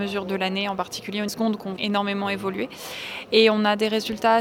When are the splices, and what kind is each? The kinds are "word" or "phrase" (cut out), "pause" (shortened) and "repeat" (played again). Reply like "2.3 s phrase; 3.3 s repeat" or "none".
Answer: 1.3 s phrase; 1.8 s word